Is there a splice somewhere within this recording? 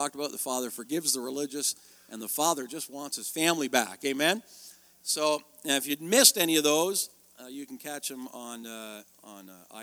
no; 0 cuts

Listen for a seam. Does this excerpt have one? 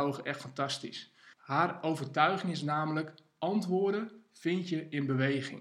yes; 1 cut; at 1.3 s

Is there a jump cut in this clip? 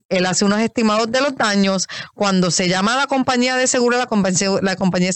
no; 0 cuts

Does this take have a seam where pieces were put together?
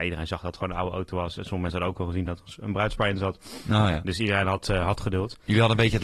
no; 0 cuts

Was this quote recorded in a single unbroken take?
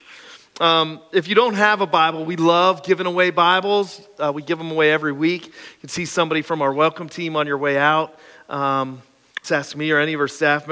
no; 1 cut; at 9.4 s

